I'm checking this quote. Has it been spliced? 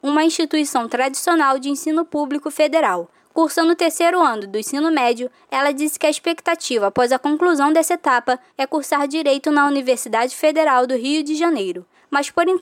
no; 0 cuts

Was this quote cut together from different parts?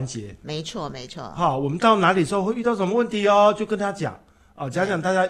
no; 0 cuts

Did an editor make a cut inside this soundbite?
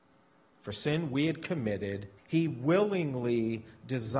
yes; 1 cut; at 2.2 s

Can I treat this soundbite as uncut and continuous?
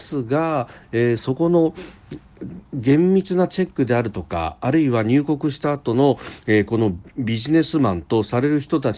no; 1 cut; at 2.7 s

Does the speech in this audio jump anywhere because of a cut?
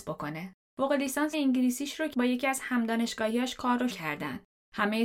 yes; 3 cuts; at 1.3 s, 2.1 s, 3.9 s

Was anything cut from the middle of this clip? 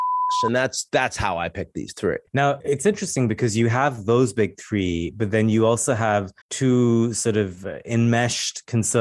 yes; 2 cuts; at 2.3 s, 6.4 s

